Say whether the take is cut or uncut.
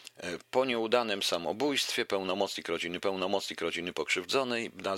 cut